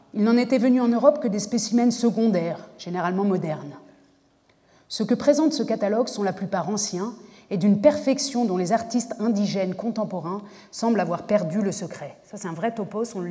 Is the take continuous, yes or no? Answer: yes